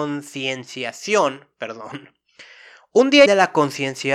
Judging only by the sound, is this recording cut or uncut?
cut